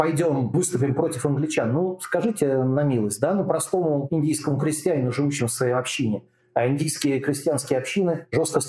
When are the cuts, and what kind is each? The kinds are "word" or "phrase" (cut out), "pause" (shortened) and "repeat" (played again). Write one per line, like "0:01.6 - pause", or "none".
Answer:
none